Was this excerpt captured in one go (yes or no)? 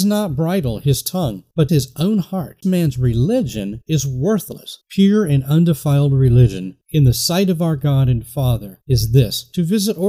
no